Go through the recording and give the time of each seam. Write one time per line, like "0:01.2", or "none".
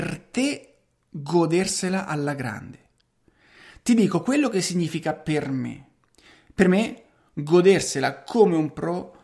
none